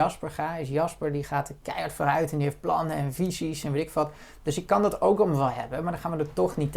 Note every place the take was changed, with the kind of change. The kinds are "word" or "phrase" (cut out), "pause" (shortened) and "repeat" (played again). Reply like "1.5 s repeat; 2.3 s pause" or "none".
none